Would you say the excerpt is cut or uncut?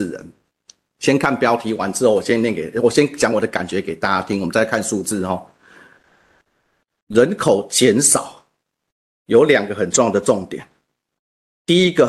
uncut